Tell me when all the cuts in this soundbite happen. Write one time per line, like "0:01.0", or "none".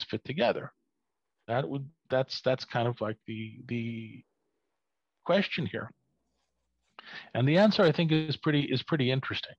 none